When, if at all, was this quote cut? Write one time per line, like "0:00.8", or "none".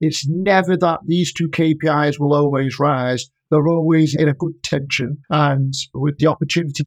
0:05.2